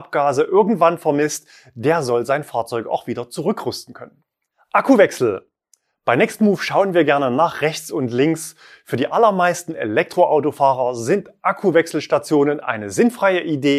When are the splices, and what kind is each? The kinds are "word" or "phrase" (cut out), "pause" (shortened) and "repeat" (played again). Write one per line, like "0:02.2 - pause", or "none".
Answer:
none

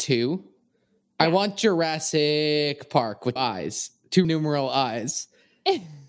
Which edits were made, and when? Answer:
0:03.4 - word
0:04.2 - word

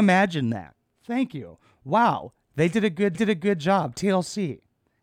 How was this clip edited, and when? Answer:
0:03.1 - repeat

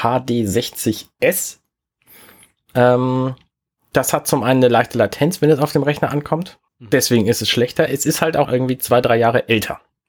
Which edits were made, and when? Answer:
0:06.7 - pause
0:08.4 - word

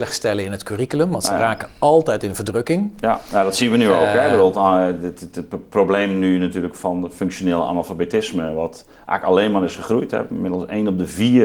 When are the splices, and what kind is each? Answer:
none

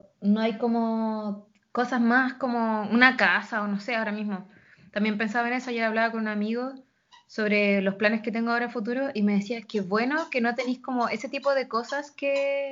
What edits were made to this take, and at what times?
none

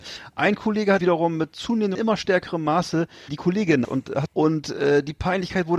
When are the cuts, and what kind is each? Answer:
0:01.0 - word
0:01.9 - phrase
0:03.3 - word
0:03.8 - word
0:04.3 - phrase

